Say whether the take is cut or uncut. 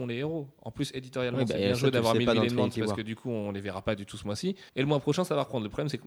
cut